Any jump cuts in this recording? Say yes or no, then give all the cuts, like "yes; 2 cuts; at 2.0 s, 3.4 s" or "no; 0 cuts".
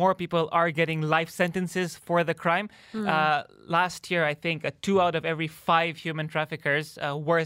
no; 0 cuts